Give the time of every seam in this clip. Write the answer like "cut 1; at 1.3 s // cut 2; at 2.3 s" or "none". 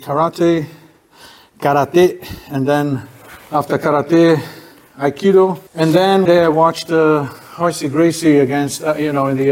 cut 1; at 3.4 s // cut 2; at 5.7 s // cut 3; at 6.3 s